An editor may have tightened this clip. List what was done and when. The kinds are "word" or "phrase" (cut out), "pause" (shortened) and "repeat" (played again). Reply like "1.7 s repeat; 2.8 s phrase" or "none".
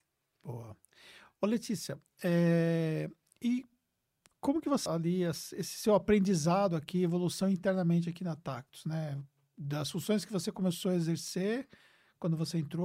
4.9 s word